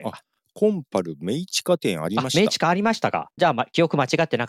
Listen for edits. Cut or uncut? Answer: cut